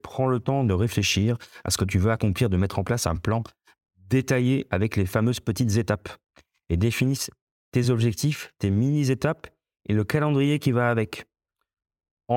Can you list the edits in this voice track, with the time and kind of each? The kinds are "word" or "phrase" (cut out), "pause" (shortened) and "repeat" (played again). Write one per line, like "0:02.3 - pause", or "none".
none